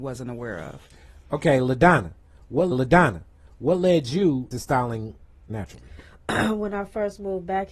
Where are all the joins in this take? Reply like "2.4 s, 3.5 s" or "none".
2.7 s, 4.5 s, 5.5 s